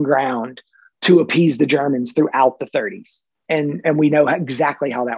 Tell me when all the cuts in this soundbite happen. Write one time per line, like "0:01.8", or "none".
none